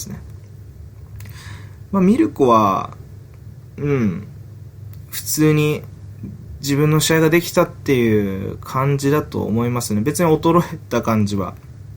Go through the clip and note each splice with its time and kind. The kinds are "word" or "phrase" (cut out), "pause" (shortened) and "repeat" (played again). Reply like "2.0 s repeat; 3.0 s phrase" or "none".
none